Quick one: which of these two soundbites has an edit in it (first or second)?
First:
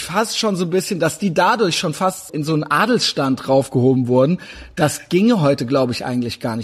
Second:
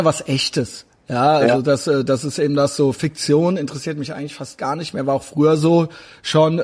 first